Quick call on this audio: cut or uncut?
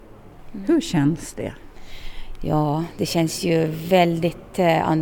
uncut